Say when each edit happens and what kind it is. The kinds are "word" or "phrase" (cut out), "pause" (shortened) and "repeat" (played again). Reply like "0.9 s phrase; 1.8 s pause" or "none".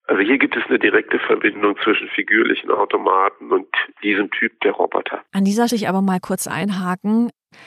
5.3 s pause; 5.7 s phrase